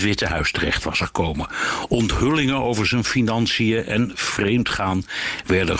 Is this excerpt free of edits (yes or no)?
yes